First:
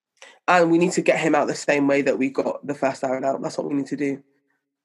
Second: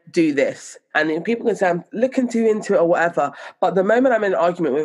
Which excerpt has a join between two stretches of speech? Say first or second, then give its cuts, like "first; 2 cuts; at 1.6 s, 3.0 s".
second; 2 cuts; at 0.9 s, 1.9 s